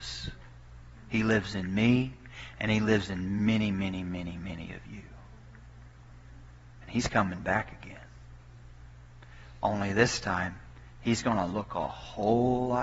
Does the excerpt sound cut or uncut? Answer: uncut